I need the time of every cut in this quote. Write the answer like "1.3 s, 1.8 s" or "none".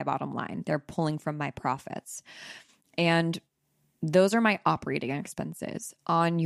none